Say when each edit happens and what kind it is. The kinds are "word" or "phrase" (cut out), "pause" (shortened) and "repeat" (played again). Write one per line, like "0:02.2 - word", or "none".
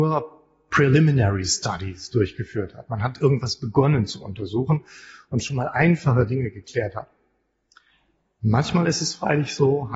none

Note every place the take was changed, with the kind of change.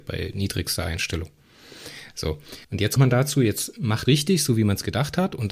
0:02.6 - pause
0:03.0 - word
0:04.1 - phrase

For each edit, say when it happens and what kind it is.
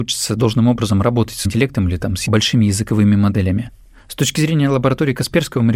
0:01.4 - word

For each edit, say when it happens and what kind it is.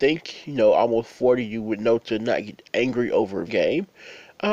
0:03.5 - word

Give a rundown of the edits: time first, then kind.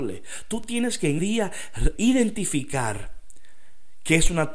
0:01.2 - word
0:02.0 - word

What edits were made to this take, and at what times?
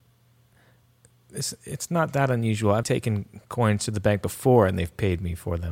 0:02.8 - word

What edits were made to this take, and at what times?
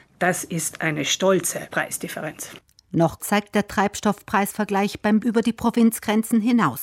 0:03.2 - phrase
0:05.2 - word

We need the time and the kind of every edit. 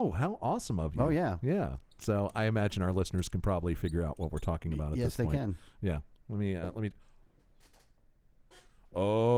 none

